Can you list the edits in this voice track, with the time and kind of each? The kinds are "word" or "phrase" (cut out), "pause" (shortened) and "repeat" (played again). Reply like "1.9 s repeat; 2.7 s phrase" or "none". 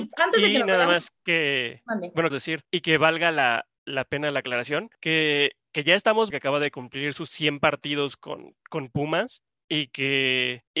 2.3 s word; 6.3 s phrase; 9.5 s pause

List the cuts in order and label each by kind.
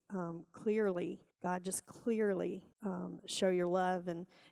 1.3 s pause; 2.7 s pause

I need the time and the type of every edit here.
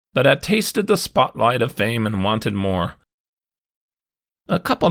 none

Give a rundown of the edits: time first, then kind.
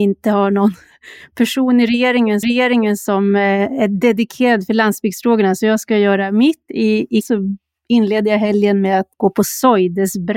2.4 s repeat; 7.2 s word; 9.1 s pause

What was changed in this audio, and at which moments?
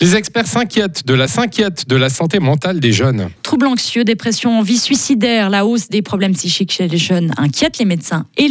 1.3 s repeat

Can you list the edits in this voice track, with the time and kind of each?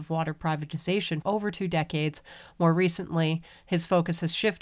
1.2 s word

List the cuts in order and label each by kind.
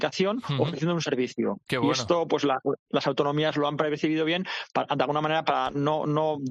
none

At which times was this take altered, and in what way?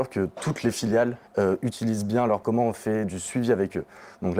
1.3 s pause; 2.4 s phrase

